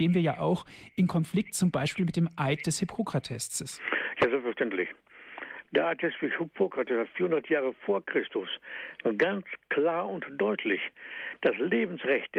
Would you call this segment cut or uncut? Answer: uncut